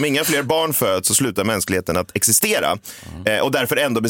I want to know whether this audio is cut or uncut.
uncut